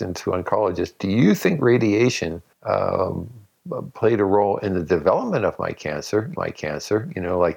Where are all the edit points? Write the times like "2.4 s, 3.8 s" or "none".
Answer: 2.5 s, 6.4 s

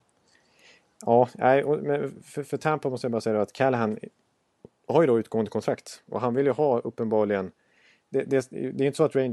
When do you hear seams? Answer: none

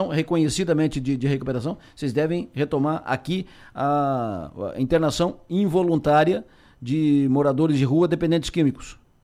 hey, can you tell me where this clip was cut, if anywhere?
none

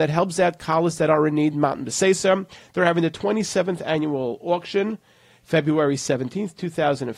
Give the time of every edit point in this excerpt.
none

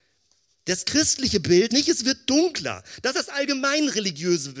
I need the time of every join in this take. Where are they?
1.7 s, 3.1 s

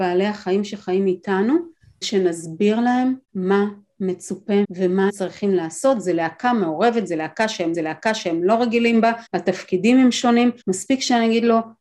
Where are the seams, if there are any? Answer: 2.0 s, 3.2 s, 4.6 s, 5.1 s, 7.7 s, 9.3 s, 10.6 s

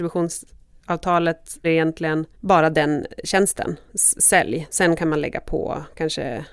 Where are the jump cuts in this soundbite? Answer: 1.6 s, 2.3 s

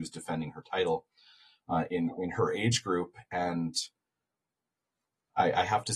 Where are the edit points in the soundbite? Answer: none

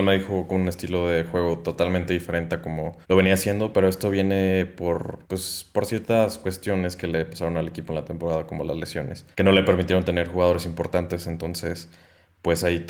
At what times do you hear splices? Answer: 3.0 s, 5.2 s, 9.3 s

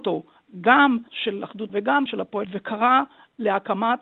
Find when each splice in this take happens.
1.1 s, 1.7 s, 2.1 s, 2.4 s

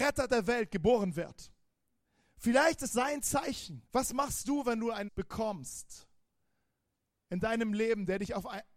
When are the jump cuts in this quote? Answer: 2.0 s, 2.9 s, 3.9 s, 5.1 s

